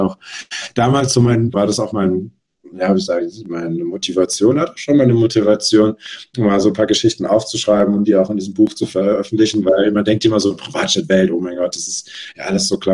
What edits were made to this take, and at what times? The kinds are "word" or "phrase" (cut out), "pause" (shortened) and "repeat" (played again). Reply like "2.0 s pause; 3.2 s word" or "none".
1.5 s word